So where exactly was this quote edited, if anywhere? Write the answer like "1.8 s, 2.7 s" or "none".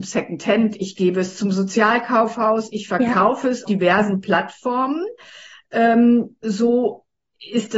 3.7 s